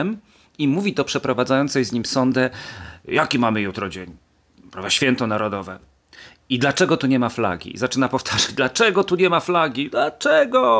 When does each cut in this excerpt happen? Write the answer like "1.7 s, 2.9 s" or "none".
none